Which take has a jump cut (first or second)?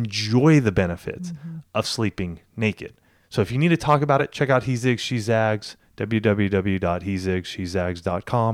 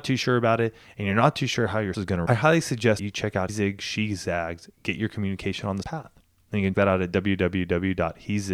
second